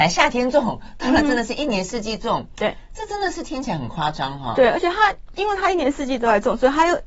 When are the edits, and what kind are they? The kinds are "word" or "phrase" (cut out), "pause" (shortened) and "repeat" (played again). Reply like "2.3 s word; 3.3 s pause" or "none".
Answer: none